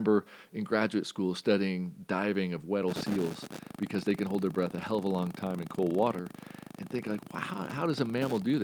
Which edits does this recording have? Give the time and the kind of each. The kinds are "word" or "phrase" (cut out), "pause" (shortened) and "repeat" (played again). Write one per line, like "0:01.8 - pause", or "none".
none